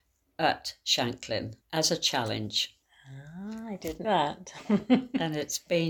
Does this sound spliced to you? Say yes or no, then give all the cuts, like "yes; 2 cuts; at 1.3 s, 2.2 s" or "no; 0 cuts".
yes; 2 cuts; at 1.6 s, 4.0 s